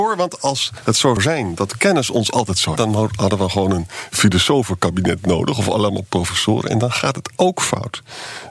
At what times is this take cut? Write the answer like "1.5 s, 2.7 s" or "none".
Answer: 1.2 s, 2.8 s

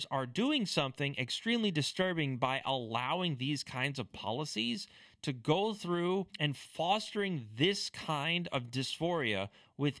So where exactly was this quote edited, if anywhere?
6.3 s

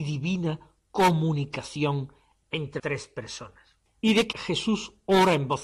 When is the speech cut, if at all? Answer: 2.8 s, 4.3 s

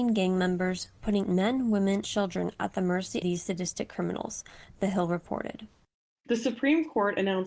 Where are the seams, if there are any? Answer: 1.3 s, 2.0 s, 3.2 s

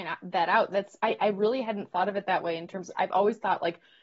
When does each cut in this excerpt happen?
none

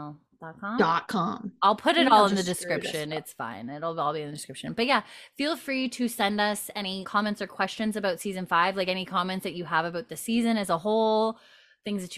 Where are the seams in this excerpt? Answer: 7.0 s

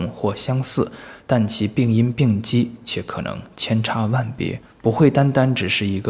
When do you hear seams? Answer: 4.7 s

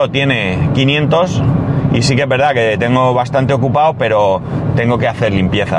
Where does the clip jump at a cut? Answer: none

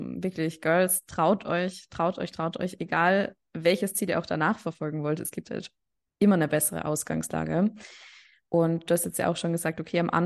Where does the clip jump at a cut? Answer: none

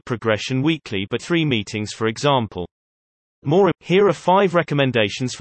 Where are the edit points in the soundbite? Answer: 1.2 s, 3.7 s

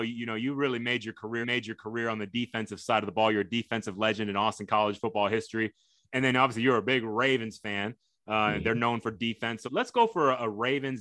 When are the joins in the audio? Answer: 1.4 s, 9.6 s

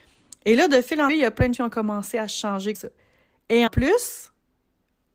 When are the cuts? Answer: 1.1 s, 1.5 s, 2.7 s, 3.7 s

